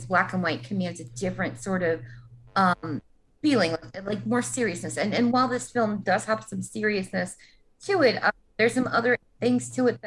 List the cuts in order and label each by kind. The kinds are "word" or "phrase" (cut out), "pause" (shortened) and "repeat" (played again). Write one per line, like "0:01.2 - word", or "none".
none